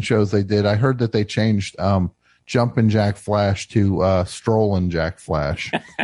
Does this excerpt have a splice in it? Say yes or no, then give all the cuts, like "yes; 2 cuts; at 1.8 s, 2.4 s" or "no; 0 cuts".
no; 0 cuts